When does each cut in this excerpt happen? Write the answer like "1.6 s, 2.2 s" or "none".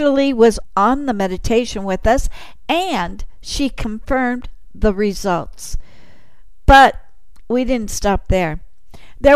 none